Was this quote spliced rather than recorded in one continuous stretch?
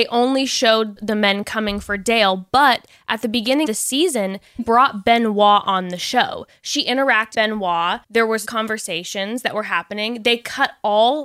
yes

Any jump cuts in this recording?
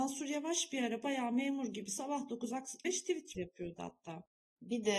yes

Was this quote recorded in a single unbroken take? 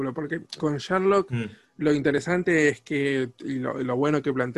yes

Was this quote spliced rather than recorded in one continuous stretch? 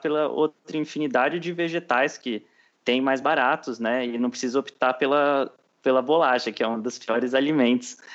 no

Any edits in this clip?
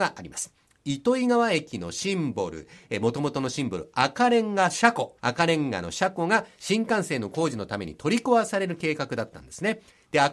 yes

